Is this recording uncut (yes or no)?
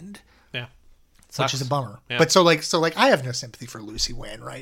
yes